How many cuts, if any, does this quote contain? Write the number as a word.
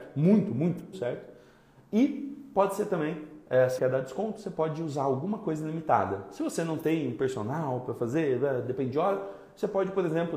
two